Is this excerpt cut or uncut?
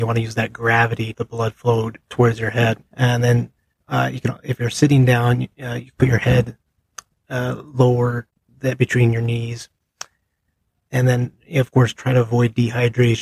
cut